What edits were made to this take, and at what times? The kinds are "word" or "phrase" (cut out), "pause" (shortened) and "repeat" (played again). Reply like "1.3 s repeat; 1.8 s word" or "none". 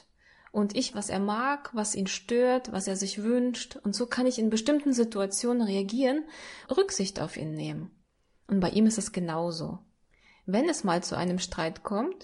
0.9 s word; 6.6 s word